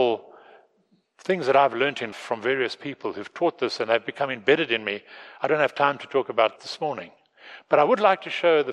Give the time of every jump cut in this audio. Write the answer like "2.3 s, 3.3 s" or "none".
2.1 s, 6.6 s